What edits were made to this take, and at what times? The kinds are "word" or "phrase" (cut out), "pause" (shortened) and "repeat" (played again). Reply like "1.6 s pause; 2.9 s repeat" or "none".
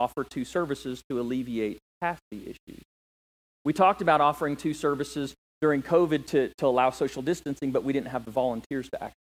none